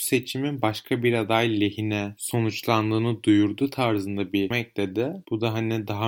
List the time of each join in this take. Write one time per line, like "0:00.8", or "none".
0:04.5

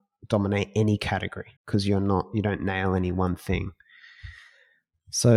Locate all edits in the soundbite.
0:01.6

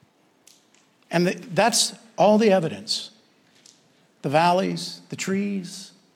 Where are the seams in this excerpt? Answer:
none

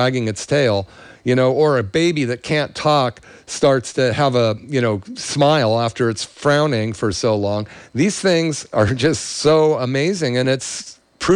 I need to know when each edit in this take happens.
none

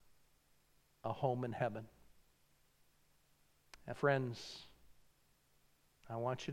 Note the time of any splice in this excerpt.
0:03.9

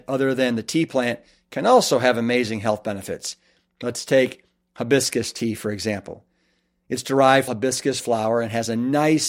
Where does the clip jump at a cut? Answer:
0:07.5

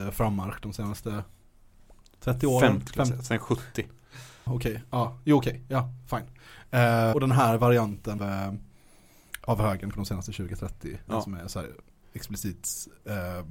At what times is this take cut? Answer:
0:02.9
0:04.5
0:07.1
0:08.2
0:09.9
0:11.1
0:12.0

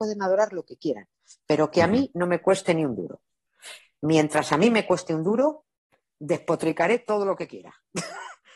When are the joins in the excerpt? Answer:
none

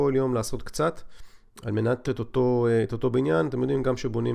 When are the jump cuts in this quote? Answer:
0:02.0

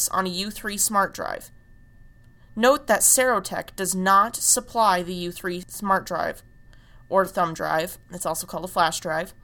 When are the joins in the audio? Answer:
none

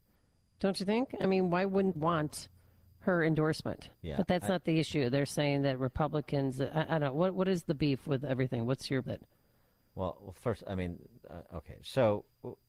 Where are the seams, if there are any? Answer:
0:02.0
0:03.9
0:09.0

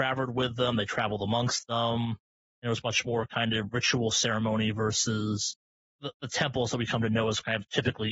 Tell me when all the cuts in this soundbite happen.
none

